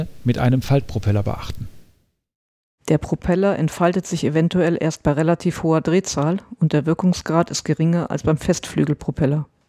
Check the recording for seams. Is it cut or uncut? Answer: uncut